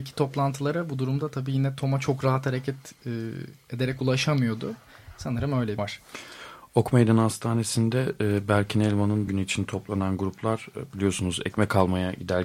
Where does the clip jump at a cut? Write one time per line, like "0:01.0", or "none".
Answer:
0:05.8
0:09.3